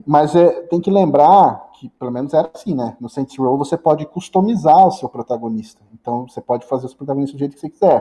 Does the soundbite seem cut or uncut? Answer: uncut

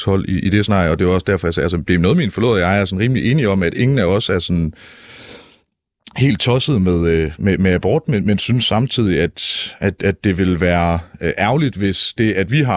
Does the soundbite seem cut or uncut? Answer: uncut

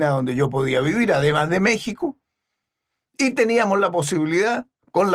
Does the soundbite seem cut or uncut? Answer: uncut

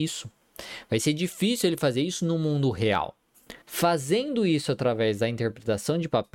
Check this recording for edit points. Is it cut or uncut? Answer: cut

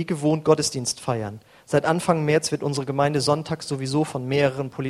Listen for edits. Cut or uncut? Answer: uncut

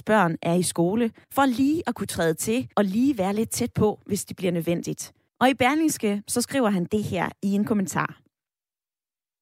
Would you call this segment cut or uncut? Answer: cut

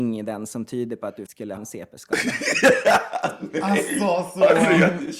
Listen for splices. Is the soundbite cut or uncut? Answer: cut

